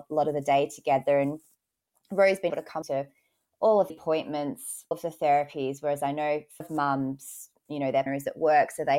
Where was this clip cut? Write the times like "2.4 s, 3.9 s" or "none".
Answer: 2.5 s, 2.8 s, 3.9 s, 4.9 s, 6.6 s, 8.1 s

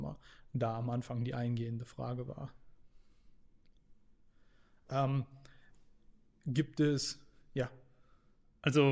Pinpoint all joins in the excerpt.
none

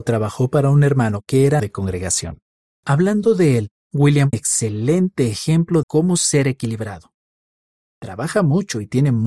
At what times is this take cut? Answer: 1.6 s, 2.6 s, 4.3 s, 5.8 s

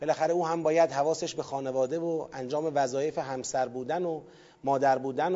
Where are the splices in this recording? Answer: none

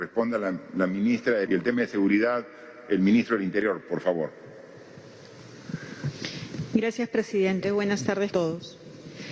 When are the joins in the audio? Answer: 1.5 s, 8.3 s

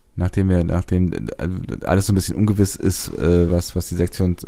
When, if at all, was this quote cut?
none

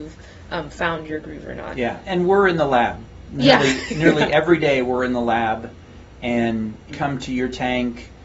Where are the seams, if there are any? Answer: 2.0 s, 6.9 s

